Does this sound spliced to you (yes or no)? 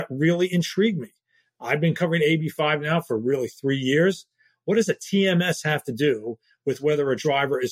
no